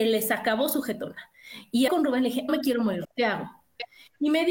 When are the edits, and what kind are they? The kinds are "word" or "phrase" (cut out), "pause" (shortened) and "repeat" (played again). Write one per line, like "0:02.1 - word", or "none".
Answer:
0:01.9 - word
0:02.5 - word
0:03.0 - word